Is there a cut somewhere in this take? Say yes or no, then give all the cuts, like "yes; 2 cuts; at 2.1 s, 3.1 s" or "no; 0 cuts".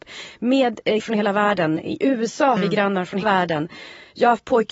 yes; 4 cuts; at 1.0 s, 2.0 s, 2.6 s, 3.2 s